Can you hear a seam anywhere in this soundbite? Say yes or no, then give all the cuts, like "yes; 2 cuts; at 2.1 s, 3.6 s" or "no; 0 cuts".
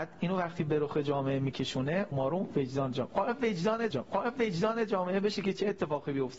yes; 2 cuts; at 2.1 s, 3.9 s